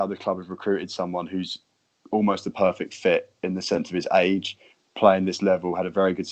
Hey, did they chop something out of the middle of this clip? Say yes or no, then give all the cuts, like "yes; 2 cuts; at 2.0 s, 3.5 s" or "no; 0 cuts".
no; 0 cuts